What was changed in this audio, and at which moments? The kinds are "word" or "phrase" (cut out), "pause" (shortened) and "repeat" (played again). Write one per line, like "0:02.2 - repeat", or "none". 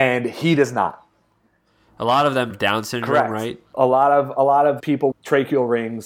0:02.5 - word
0:04.8 - word
0:05.1 - word